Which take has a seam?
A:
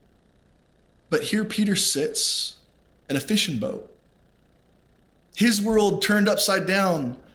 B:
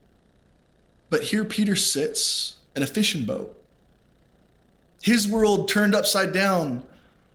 B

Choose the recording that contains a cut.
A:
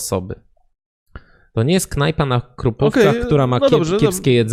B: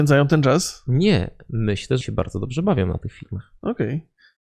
B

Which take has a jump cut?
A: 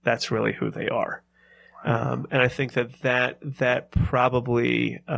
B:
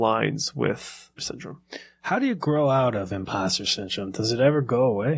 B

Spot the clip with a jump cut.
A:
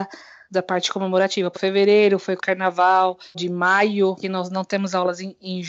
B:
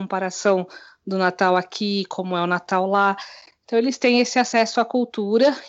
A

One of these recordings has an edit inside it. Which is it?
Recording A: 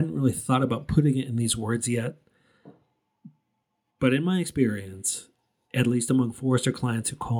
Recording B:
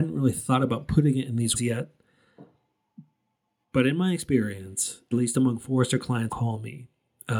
B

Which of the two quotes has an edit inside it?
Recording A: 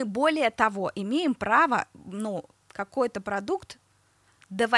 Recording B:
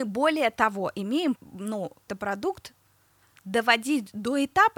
B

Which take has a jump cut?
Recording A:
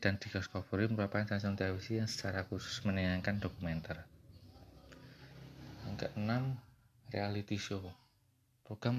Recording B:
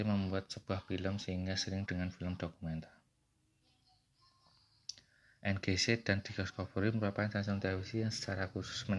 B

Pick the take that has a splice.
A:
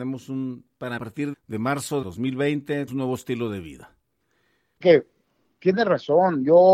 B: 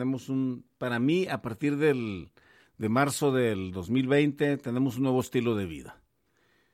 A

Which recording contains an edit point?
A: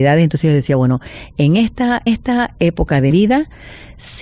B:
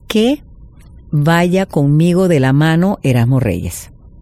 A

